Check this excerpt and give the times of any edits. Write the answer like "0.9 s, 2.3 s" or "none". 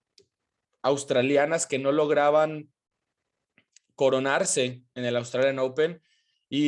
none

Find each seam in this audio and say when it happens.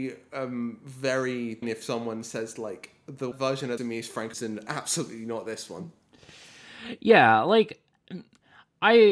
1.6 s, 3.3 s, 3.8 s, 4.3 s

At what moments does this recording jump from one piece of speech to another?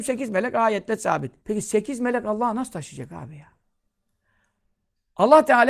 1.4 s

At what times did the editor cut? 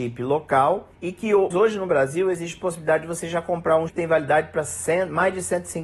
0.9 s, 1.5 s, 3.9 s

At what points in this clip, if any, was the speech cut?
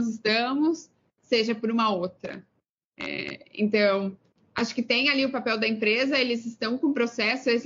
none

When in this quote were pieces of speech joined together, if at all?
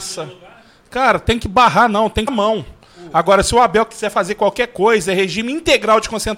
2.3 s

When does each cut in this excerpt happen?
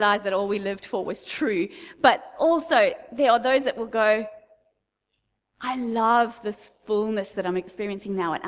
none

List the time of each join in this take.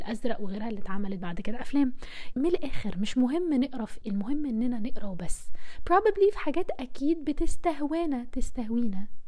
2.3 s, 4.0 s

